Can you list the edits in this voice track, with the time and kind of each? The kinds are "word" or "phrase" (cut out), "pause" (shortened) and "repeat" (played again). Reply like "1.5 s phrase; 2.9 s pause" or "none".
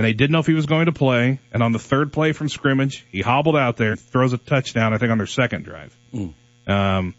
3.9 s word